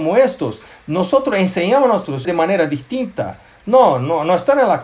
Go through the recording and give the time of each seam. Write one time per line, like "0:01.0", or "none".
0:02.2